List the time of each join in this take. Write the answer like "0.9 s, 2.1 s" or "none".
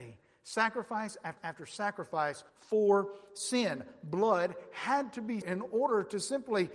1.4 s, 2.5 s, 5.4 s

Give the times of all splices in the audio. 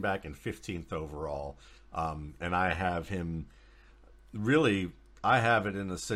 none

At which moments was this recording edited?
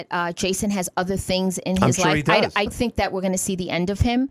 2.7 s

